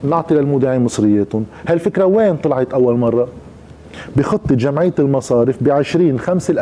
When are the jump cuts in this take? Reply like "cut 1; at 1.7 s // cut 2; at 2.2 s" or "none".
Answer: none